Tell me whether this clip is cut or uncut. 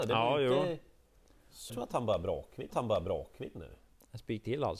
cut